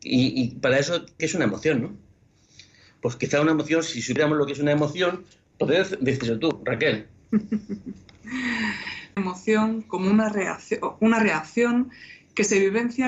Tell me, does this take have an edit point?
yes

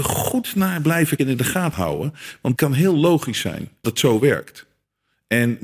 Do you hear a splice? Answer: yes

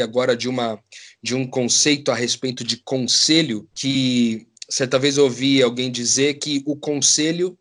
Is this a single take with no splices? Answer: no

